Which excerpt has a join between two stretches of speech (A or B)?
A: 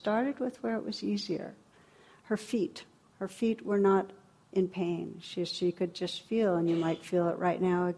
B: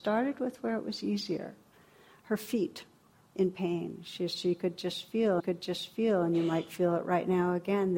B